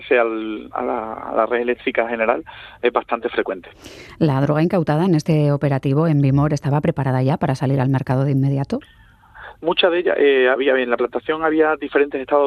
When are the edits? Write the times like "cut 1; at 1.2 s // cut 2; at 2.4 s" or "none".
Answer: none